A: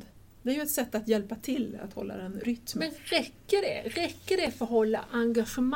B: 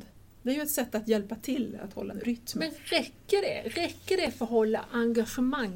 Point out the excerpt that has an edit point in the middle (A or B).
B